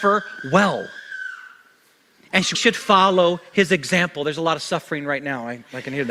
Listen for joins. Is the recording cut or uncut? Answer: cut